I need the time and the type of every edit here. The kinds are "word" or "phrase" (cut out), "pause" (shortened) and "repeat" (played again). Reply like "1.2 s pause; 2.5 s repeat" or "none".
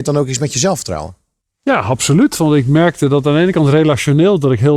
none